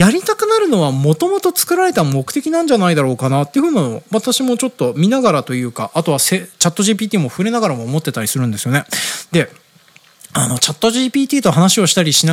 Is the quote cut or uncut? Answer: uncut